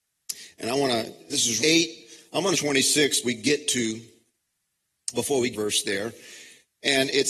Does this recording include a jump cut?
yes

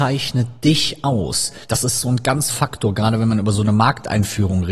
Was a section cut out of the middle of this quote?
yes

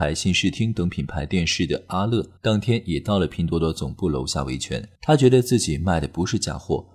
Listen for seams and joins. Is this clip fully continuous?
no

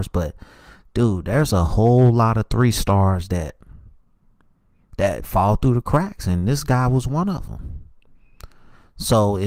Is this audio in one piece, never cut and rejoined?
yes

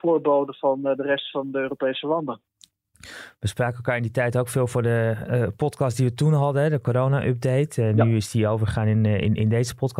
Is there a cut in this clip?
no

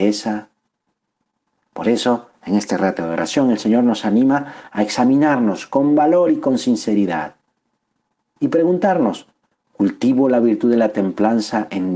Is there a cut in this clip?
no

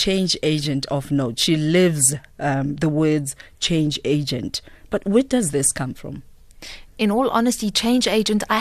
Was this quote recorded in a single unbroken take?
yes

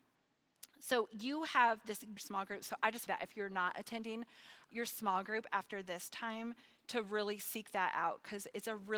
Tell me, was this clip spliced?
yes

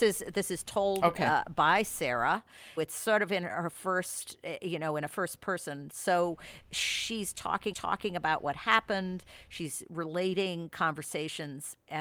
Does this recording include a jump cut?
yes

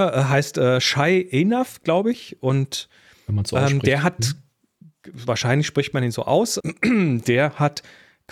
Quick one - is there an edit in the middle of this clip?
yes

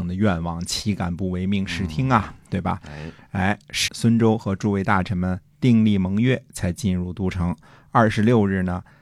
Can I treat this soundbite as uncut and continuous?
no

